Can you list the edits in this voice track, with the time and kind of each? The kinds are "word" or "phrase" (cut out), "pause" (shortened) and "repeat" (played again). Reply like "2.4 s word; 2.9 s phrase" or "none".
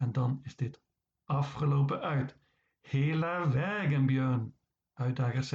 none